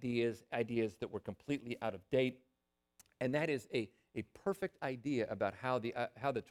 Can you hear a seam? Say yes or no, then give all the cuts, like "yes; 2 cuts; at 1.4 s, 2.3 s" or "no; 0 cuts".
no; 0 cuts